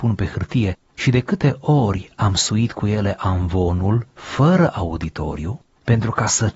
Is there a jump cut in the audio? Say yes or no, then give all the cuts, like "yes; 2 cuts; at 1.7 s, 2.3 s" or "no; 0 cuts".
no; 0 cuts